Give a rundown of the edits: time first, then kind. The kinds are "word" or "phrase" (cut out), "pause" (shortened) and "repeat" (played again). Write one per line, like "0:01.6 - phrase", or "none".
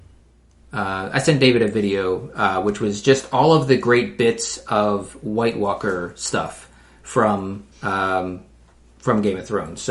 0:07.7 - pause